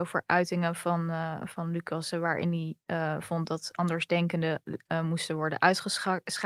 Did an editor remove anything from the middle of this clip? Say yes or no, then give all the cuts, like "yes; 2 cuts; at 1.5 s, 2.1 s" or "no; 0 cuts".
no; 0 cuts